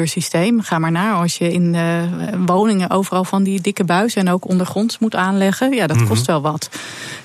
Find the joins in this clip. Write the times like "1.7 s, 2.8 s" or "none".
none